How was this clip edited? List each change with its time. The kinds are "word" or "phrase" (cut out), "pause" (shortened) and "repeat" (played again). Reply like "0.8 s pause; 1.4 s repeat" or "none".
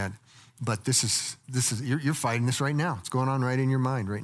1.4 s pause